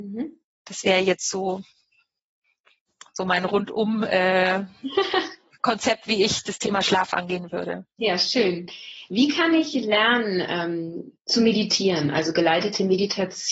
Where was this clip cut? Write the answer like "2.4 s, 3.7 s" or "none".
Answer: none